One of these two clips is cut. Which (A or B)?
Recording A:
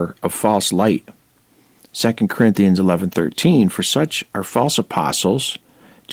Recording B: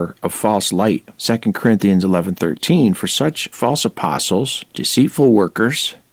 B